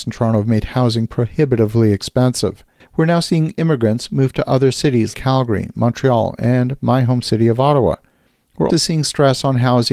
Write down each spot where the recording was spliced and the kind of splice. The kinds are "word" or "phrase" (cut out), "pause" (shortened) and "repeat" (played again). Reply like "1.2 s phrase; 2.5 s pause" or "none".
2.8 s pause; 5.1 s word; 8.7 s word